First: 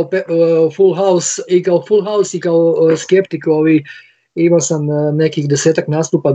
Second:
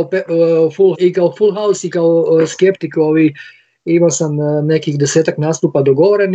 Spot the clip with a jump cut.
second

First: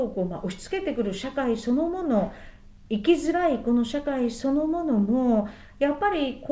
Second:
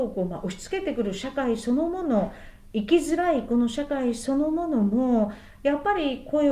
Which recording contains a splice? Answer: second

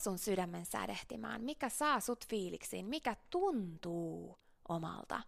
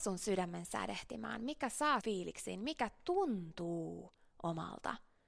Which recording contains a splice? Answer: second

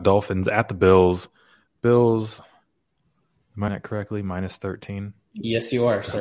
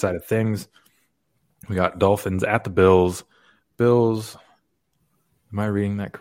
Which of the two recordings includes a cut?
first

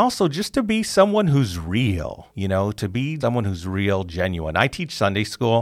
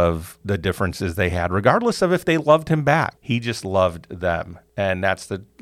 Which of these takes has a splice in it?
first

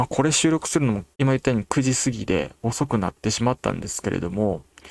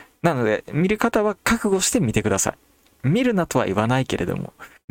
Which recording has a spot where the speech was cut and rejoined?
first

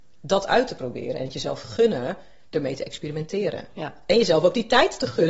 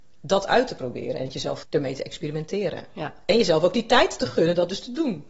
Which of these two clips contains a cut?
second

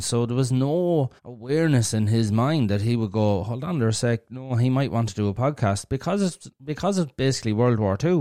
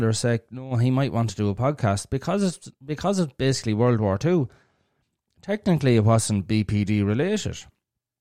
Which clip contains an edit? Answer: first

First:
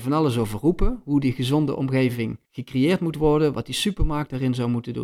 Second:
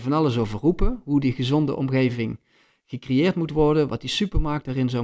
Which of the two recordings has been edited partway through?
first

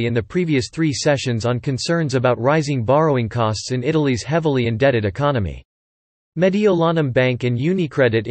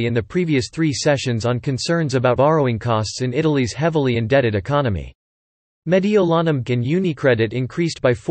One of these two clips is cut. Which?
second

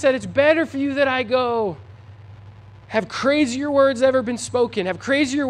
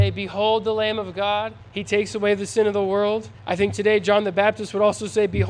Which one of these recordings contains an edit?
second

